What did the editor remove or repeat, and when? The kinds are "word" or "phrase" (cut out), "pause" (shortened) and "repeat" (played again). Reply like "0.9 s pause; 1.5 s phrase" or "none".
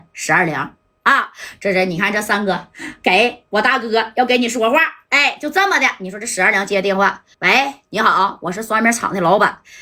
7.3 s pause